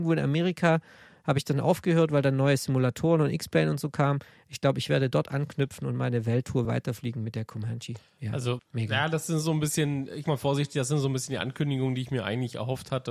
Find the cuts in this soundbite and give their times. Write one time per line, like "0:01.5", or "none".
0:06.6
0:08.6
0:10.2